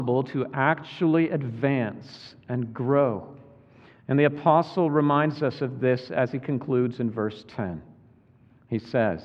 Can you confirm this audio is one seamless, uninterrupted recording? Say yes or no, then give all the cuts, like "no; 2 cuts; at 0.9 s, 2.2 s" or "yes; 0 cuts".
yes; 0 cuts